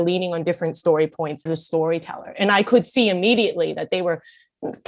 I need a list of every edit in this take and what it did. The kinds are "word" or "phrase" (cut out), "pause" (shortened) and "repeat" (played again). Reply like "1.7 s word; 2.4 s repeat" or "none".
1.5 s word